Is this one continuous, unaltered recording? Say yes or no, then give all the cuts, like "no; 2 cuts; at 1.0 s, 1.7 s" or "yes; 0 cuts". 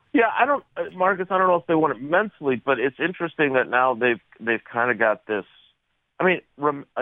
yes; 0 cuts